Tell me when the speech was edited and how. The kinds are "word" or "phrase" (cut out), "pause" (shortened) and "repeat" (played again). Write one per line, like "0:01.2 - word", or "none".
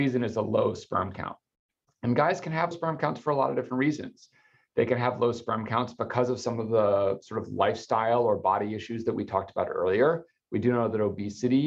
0:02.7 - word